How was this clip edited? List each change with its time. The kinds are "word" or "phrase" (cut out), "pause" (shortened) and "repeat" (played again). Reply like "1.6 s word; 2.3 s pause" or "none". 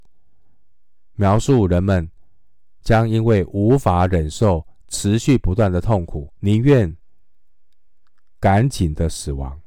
6.4 s pause